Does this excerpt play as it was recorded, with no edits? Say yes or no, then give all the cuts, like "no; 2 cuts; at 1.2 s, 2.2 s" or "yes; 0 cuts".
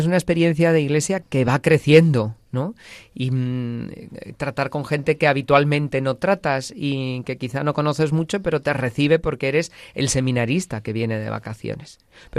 no; 1 cut; at 1.2 s